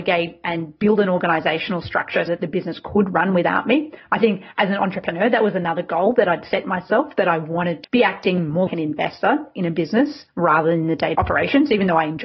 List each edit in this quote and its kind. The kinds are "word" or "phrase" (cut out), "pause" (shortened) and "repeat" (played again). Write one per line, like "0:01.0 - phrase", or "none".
0:02.3 - word
0:07.8 - word
0:08.7 - word
0:11.1 - word